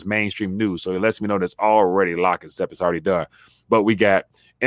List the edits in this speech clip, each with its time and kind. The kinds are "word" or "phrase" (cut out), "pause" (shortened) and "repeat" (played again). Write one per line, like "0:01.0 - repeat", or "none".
none